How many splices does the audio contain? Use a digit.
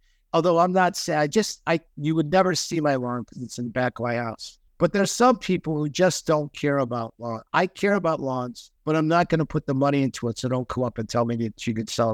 2